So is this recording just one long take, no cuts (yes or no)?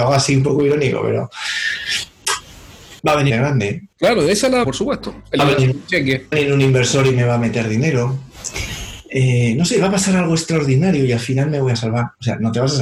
no